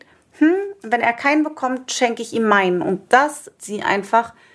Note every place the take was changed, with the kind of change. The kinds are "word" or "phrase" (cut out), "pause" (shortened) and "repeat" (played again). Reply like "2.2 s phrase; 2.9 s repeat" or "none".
3.6 s word

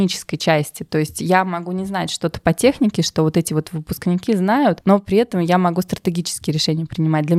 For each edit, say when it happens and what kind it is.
none

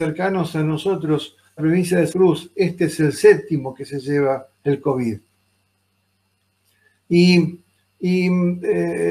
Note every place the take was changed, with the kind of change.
1.6 s phrase; 2.1 s word; 4.5 s pause

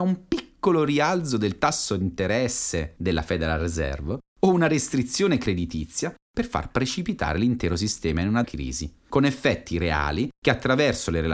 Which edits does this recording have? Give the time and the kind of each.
8.4 s word

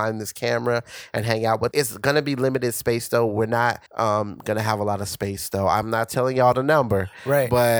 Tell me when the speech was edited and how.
1.7 s word; 3.9 s pause

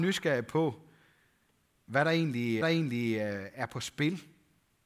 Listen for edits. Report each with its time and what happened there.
2.6 s repeat

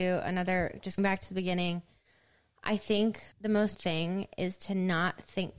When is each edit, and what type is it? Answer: 1.0 s word; 3.3 s pause; 3.7 s word

